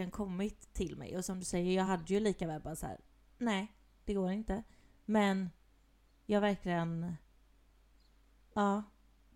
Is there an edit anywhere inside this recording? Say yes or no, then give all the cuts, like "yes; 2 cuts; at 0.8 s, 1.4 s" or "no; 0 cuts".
no; 0 cuts